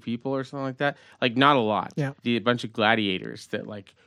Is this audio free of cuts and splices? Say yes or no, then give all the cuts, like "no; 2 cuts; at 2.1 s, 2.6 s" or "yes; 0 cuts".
no; 1 cut; at 2.2 s